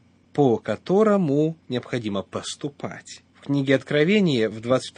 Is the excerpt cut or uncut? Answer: cut